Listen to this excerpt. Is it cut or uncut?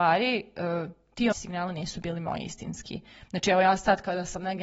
cut